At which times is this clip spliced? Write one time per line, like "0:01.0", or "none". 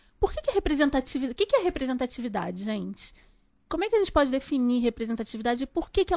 none